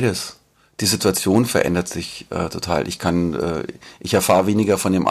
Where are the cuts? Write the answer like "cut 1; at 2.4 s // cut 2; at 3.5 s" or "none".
none